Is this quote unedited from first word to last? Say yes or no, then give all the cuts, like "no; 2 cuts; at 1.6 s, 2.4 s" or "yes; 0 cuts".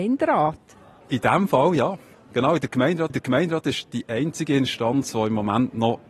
no; 1 cut; at 3.1 s